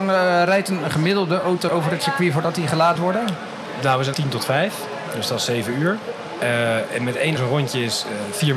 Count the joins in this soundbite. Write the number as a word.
four